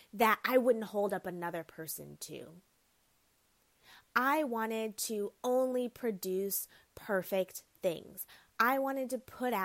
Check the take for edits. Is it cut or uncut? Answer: uncut